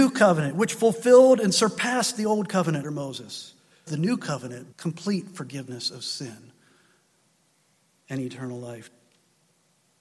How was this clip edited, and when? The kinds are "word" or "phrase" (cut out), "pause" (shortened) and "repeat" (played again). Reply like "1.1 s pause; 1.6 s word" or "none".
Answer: 2.8 s word; 3.9 s word; 4.7 s word